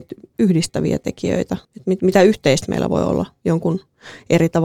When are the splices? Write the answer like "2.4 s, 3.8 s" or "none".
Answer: 1.6 s